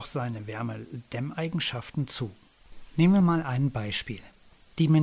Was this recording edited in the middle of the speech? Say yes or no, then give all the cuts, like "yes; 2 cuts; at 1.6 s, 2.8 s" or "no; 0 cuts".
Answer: no; 0 cuts